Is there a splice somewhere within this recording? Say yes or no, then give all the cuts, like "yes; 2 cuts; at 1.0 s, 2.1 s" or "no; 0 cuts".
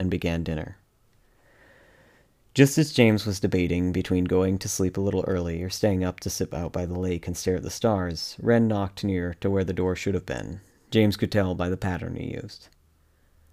no; 0 cuts